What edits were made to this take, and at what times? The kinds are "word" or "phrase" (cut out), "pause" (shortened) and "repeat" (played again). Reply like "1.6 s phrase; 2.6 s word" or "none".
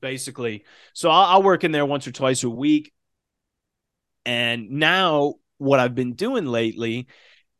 none